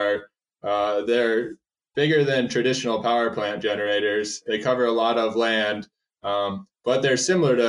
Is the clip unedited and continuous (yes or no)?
yes